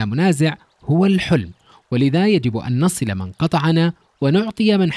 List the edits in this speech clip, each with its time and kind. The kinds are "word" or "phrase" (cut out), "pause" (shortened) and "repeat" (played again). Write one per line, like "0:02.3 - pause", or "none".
none